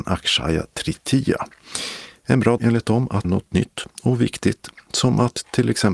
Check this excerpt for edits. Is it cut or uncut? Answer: cut